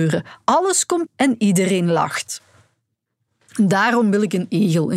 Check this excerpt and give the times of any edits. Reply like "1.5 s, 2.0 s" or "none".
1.1 s